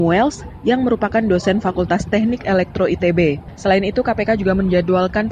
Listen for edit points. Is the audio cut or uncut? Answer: uncut